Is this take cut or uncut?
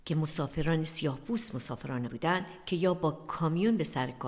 cut